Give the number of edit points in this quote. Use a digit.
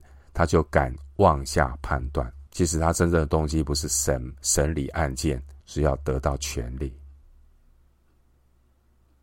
2